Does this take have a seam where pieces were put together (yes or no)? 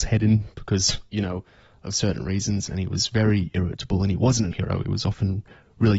yes